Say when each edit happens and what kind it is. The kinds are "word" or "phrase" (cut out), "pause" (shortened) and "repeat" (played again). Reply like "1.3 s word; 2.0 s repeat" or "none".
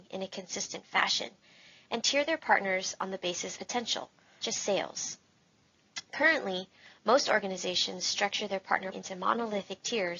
3.6 s word; 4.4 s word; 8.9 s word